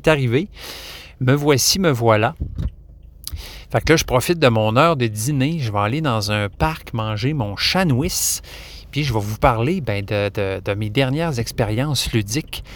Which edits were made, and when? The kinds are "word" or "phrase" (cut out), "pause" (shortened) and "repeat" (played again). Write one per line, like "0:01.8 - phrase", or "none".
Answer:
none